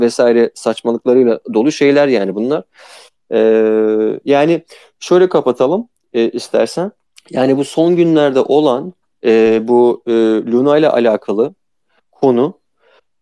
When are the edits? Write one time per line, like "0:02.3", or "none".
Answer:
0:07.1